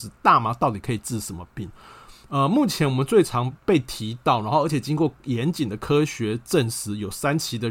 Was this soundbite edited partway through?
yes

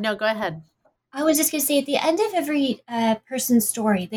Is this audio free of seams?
yes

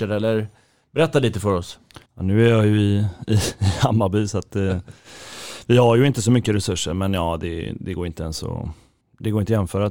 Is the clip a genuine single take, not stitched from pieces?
no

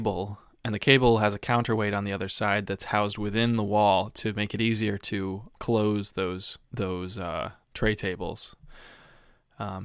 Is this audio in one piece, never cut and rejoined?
no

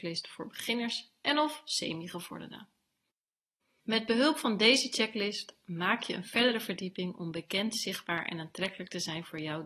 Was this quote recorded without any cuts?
yes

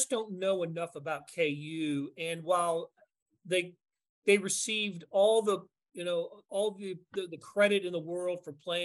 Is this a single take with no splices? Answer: no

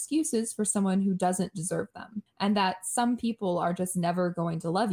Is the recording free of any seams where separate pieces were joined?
no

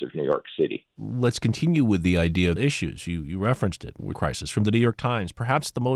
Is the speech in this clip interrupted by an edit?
yes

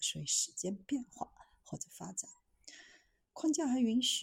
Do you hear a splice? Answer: no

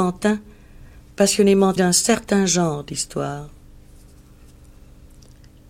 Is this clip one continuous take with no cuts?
no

